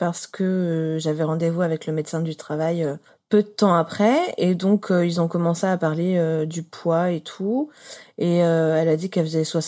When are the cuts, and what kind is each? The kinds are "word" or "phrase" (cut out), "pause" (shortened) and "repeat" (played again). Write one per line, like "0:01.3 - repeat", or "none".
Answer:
0:03.1 - pause